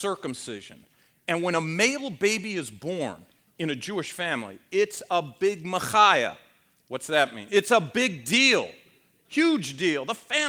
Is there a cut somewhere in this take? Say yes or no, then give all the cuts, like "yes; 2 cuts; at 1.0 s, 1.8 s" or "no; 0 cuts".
no; 0 cuts